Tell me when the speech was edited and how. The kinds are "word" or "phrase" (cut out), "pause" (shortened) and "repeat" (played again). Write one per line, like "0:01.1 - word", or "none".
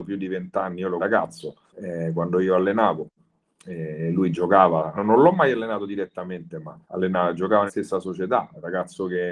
0:01.0 - phrase
0:01.7 - pause
0:05.0 - word
0:06.8 - pause
0:07.7 - word